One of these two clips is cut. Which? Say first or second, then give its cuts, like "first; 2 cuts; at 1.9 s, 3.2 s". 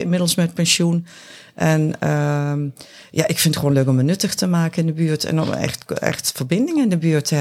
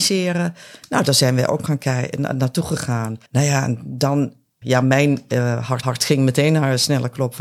second; 4 cuts; at 1.6 s, 3.3 s, 4.6 s, 5.8 s